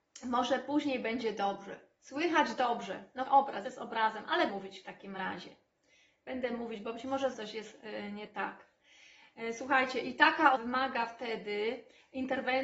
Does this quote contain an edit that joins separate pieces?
yes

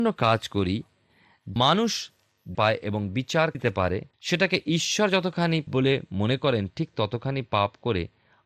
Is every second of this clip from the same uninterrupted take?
no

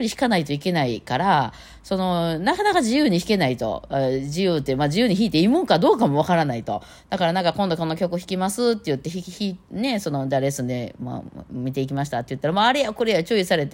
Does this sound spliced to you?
no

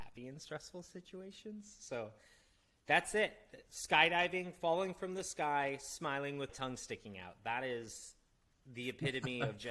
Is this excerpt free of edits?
no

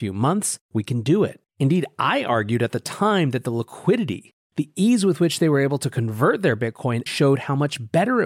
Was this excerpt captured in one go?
no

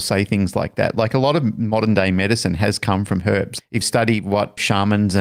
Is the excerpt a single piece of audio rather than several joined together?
no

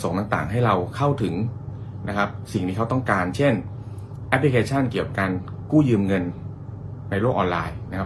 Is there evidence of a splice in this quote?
no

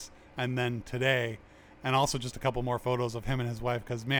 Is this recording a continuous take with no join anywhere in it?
yes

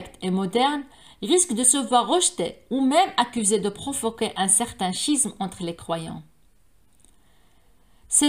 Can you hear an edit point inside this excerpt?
no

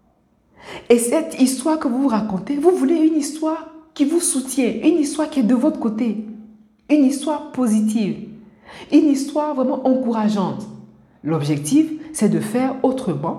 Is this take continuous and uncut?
yes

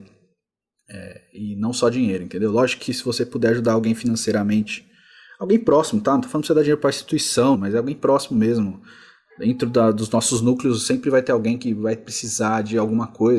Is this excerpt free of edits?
no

